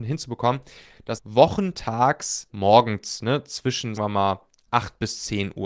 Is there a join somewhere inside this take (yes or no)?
yes